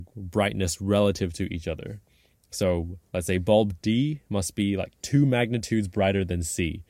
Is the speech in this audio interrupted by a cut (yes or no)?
no